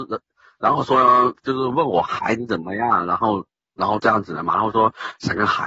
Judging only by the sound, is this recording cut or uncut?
cut